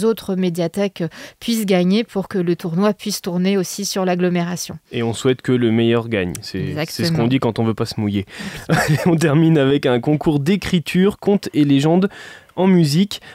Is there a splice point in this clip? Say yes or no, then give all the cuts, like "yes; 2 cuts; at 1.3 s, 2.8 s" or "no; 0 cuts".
no; 0 cuts